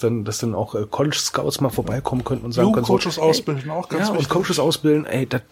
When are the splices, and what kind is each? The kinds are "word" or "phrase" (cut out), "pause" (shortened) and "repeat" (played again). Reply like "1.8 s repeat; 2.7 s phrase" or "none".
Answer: none